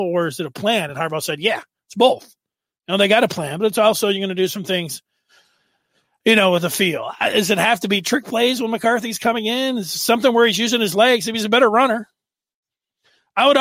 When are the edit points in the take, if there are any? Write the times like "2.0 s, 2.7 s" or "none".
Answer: none